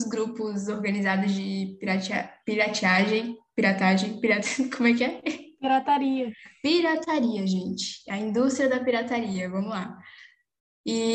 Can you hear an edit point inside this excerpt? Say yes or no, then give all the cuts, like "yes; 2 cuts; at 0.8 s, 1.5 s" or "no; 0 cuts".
no; 0 cuts